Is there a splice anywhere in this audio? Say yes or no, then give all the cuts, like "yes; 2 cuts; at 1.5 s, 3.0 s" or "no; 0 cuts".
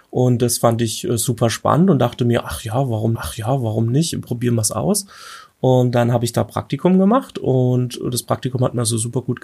yes; 1 cut; at 3.2 s